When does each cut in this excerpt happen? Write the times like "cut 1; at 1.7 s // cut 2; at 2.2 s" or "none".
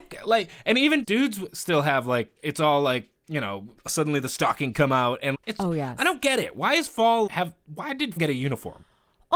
cut 1; at 1.0 s // cut 2; at 2.4 s // cut 3; at 3.2 s // cut 4; at 3.8 s // cut 5; at 4.7 s // cut 6; at 5.3 s // cut 7; at 7.3 s // cut 8; at 8.2 s